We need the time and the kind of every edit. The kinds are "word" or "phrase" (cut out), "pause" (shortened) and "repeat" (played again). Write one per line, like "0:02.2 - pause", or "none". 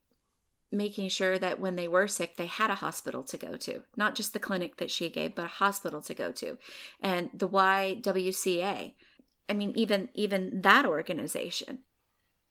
none